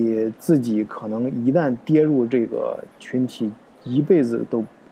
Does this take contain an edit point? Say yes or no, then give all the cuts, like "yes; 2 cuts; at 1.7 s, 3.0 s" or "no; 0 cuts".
no; 0 cuts